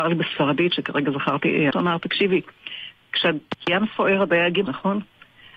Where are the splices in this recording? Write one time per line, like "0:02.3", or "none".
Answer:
0:01.7
0:04.7